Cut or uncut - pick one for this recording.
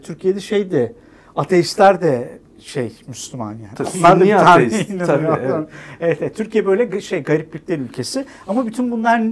uncut